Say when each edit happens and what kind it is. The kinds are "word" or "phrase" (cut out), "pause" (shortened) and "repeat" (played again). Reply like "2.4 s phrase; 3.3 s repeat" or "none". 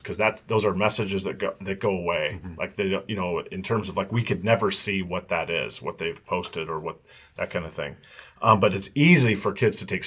none